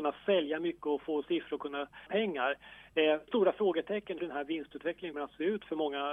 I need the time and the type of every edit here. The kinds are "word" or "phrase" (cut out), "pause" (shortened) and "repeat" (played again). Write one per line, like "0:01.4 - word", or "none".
0:01.2 - word
0:02.1 - word
0:03.3 - word
0:04.2 - word
0:05.1 - word